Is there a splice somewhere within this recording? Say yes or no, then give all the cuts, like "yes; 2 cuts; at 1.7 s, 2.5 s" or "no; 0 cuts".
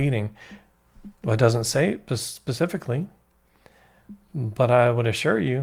yes; 1 cut; at 1.2 s